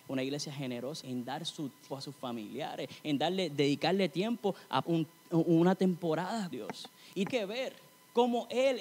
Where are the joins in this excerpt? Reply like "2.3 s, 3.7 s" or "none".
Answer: 1.0 s, 1.9 s, 4.8 s, 6.5 s, 7.3 s